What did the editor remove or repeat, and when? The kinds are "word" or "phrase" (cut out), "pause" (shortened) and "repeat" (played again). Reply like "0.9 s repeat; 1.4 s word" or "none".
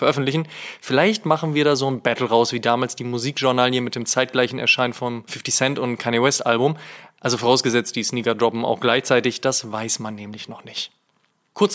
none